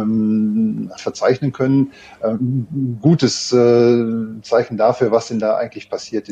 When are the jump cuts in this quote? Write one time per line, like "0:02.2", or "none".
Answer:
0:01.0